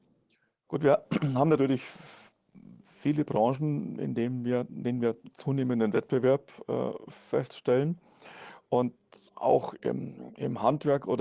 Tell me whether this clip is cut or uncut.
cut